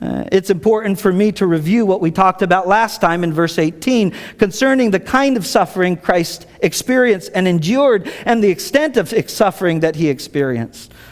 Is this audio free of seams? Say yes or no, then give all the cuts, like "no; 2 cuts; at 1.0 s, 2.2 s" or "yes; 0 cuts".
yes; 0 cuts